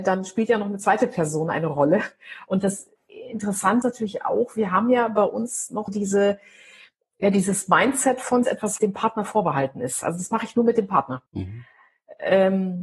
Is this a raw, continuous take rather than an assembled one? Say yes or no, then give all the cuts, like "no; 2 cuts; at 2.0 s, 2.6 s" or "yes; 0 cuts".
no; 5 cuts; at 3.8 s, 5.9 s, 8.4 s, 8.8 s, 11.3 s